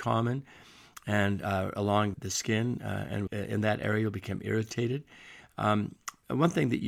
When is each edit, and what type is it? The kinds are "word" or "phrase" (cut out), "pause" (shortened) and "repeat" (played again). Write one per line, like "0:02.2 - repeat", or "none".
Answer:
0:02.1 - word
0:03.3 - word